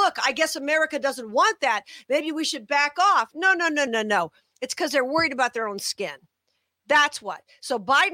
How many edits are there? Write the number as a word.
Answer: one